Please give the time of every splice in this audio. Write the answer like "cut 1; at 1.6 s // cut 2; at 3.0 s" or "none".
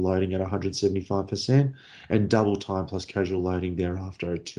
none